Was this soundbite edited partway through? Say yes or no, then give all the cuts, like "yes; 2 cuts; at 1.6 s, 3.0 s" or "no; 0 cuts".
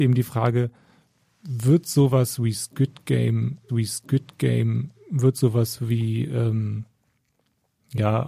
yes; 2 cuts; at 1.1 s, 3.7 s